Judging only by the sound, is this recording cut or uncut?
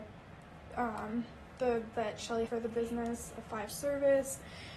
cut